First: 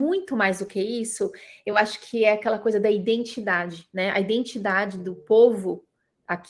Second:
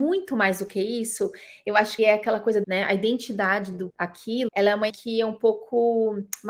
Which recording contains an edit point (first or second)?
second